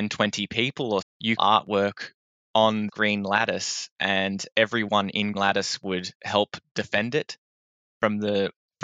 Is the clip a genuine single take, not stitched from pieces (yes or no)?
no